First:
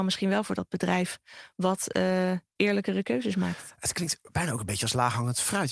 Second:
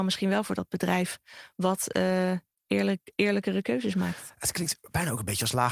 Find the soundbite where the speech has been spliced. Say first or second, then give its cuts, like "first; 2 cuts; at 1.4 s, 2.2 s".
first; 1 cut; at 2.6 s